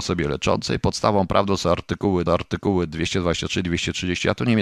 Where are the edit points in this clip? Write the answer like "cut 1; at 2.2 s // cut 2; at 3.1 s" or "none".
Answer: cut 1; at 2.3 s

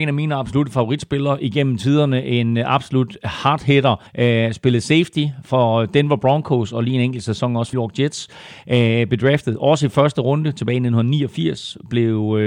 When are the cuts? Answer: cut 1; at 4.1 s // cut 2; at 7.7 s

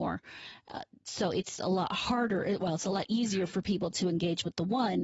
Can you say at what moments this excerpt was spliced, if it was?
cut 1; at 1.6 s

